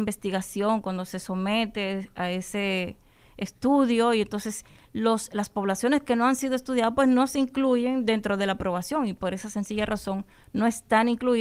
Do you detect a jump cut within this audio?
no; 0 cuts

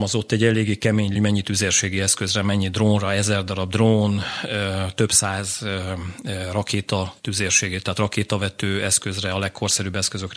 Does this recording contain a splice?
yes; 2 cuts; at 1.1 s, 7.2 s

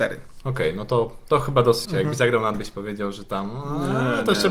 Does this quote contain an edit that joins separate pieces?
yes; 2 cuts; at 1.8 s, 2.5 s

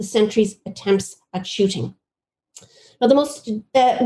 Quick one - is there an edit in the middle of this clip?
no; 0 cuts

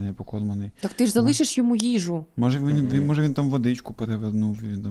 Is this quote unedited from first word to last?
yes; 0 cuts

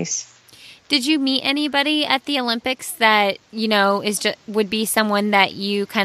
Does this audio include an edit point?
yes; 1 cut; at 3.4 s

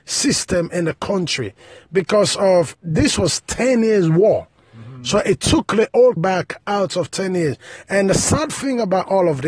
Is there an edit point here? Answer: yes; 2 cuts; at 2.7 s, 6.2 s

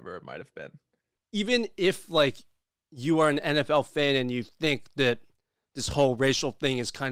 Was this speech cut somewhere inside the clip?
no; 0 cuts

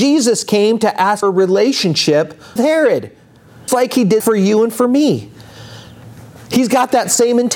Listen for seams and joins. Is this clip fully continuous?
no; 4 cuts; at 1.2 s, 2.6 s, 3.7 s, 4.2 s

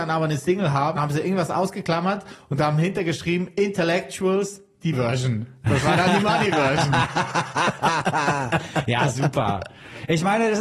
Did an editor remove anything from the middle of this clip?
yes; 2 cuts; at 1.0 s, 4.9 s

